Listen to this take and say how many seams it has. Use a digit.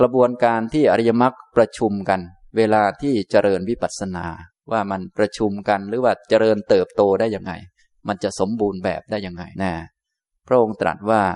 1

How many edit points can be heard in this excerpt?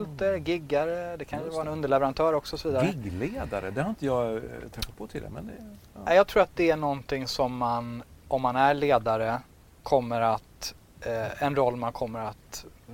1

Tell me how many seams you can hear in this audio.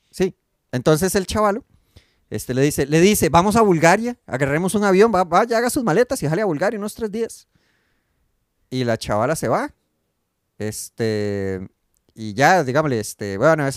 0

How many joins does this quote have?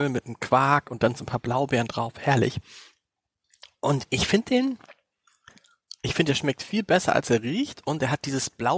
1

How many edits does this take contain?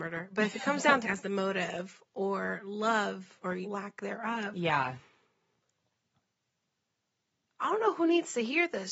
2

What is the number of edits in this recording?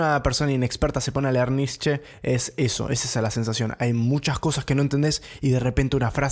0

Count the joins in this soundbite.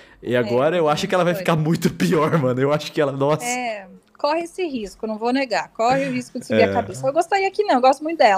0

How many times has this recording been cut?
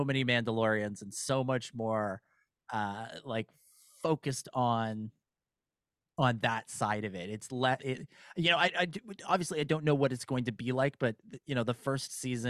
1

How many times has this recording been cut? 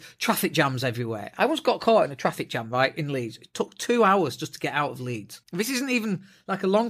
1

